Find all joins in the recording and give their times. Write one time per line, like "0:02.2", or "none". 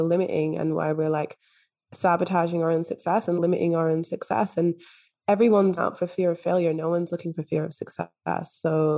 0:03.4
0:05.8